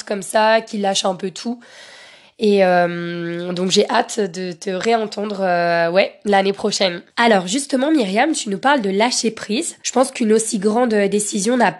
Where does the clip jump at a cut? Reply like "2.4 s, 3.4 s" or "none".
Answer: 7.1 s, 9.8 s